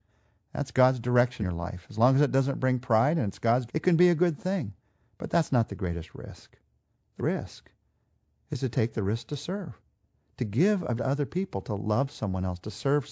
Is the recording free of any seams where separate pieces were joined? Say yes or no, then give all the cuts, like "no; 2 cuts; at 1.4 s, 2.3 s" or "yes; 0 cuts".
no; 4 cuts; at 1.4 s, 3.7 s, 7.2 s, 11.0 s